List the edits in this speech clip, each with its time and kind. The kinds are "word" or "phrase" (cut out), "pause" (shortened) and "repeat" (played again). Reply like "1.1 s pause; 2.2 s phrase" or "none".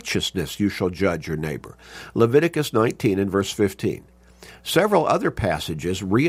none